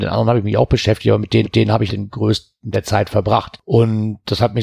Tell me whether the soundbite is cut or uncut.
cut